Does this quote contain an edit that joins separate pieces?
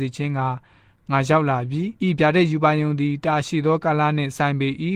yes; 1 cut; at 2.0 s

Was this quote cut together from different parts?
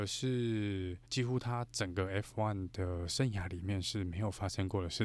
yes; 1 cut; at 1.1 s

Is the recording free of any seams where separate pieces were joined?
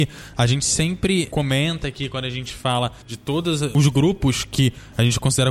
no; 1 cut; at 3.0 s

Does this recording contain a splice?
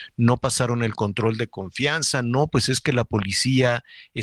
no; 0 cuts

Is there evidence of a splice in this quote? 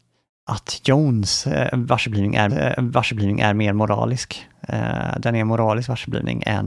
yes; 1 cut; at 2.5 s

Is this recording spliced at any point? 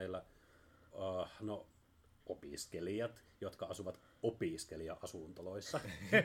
no; 0 cuts

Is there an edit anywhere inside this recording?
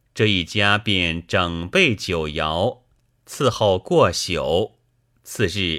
no; 0 cuts

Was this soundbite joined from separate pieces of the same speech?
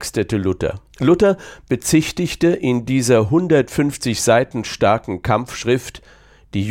yes; 1 cut; at 0.9 s

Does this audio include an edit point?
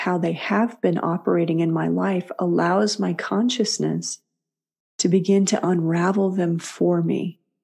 no; 0 cuts

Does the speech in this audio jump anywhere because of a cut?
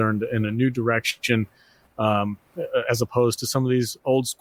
no; 0 cuts

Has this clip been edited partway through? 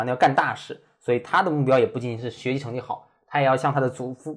no; 0 cuts

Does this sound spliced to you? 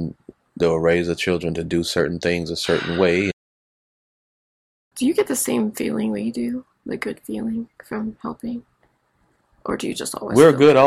no; 0 cuts

